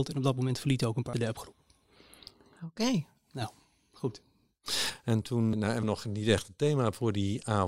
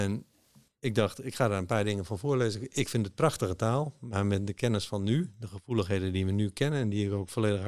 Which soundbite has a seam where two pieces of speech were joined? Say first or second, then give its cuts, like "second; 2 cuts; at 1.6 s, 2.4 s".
first; 3 cuts; at 1.1 s, 5.5 s, 5.8 s